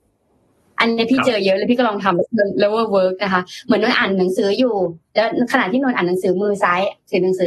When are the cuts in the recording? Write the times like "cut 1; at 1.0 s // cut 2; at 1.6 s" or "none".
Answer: none